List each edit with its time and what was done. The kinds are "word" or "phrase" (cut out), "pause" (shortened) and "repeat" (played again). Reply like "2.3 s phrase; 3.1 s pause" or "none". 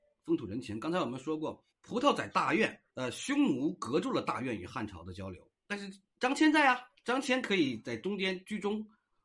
1.7 s pause; 2.9 s pause; 5.5 s pause; 6.1 s pause